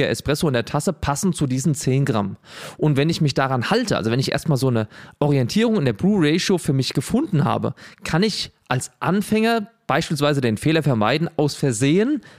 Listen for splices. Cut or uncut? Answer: uncut